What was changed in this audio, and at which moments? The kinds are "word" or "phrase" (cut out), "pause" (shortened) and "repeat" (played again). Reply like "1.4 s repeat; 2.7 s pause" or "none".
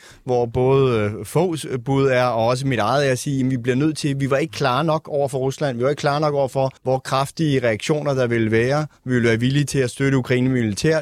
6.8 s pause